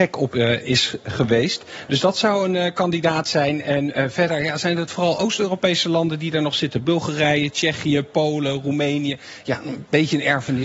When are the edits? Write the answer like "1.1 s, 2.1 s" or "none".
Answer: none